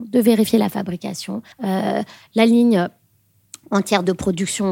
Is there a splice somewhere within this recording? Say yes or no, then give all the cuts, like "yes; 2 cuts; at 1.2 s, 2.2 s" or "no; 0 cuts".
yes; 1 cut; at 1.5 s